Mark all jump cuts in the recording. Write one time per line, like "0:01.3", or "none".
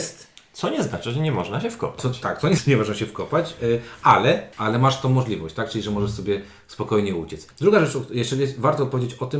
0:02.6
0:04.5
0:07.5